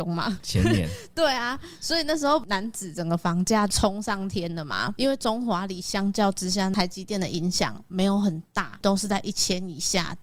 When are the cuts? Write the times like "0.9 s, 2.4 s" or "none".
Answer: none